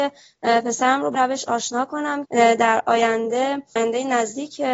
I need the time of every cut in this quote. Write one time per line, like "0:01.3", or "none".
0:01.1
0:02.2
0:03.8